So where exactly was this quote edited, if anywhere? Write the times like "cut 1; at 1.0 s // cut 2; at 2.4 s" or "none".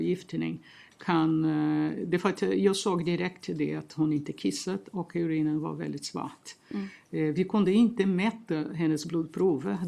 none